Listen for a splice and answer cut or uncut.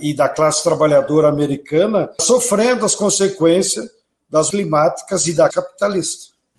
cut